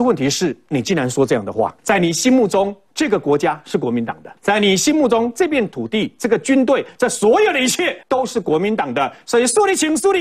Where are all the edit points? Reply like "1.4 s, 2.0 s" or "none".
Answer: 1.8 s, 4.4 s, 8.0 s